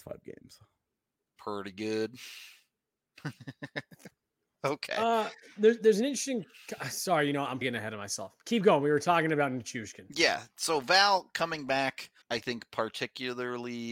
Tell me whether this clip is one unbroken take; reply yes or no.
no